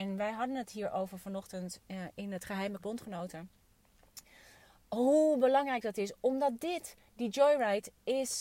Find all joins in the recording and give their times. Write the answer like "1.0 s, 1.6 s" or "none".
2.8 s